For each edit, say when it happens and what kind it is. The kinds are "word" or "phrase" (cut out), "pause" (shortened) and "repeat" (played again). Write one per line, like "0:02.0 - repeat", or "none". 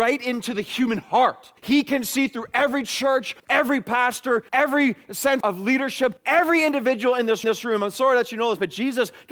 0:01.6 - pause
0:03.4 - pause
0:04.5 - pause
0:05.4 - word
0:06.2 - pause
0:07.4 - repeat